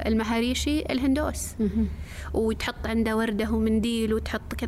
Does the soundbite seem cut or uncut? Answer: uncut